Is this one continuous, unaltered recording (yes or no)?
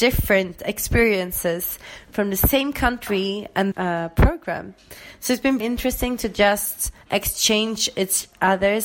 no